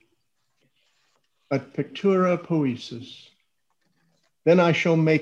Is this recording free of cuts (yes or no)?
yes